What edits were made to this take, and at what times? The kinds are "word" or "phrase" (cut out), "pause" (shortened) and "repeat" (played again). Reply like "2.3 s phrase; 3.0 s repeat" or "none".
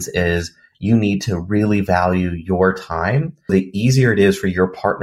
3.5 s phrase